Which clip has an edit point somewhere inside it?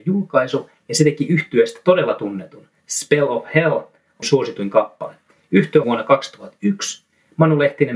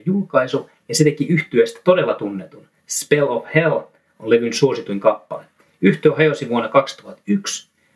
first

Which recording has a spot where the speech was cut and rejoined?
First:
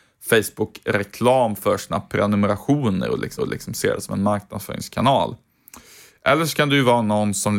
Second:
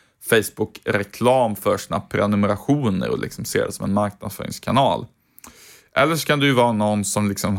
first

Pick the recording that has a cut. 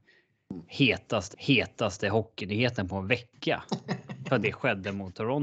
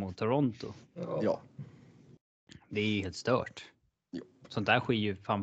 first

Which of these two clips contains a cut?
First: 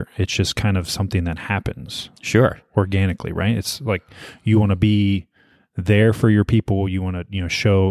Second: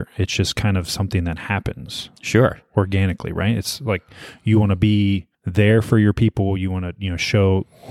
second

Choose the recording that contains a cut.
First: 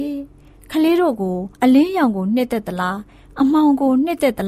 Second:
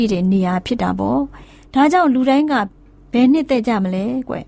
first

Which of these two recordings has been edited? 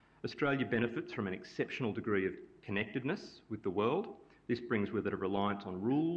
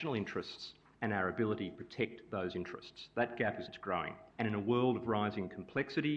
second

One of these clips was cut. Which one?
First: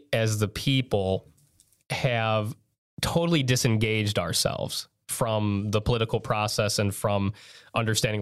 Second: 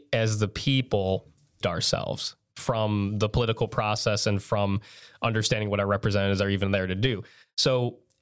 second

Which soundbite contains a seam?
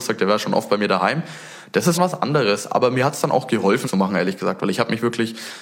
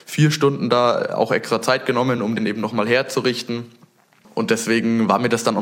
first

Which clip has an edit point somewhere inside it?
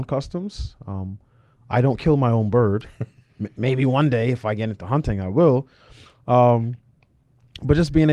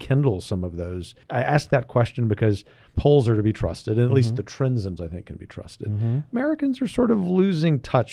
second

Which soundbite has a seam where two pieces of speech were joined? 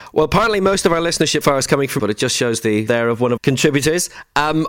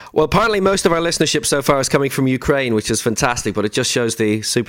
first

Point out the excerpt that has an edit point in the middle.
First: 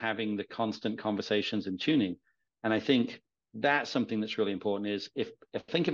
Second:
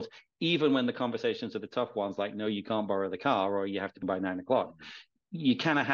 second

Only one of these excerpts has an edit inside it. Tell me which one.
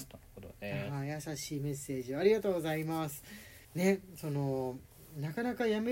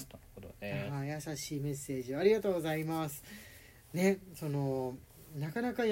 first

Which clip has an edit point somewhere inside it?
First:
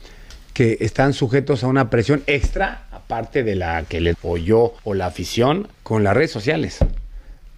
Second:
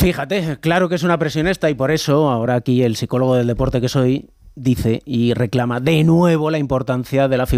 first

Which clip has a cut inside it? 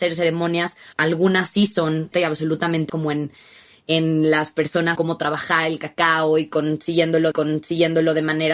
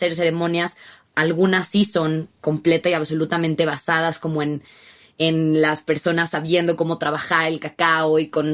first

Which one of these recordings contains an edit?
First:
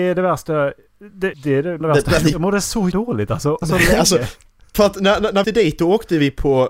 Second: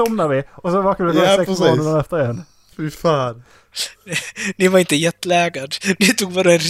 first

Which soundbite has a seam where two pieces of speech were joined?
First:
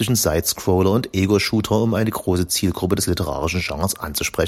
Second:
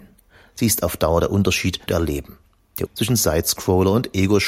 second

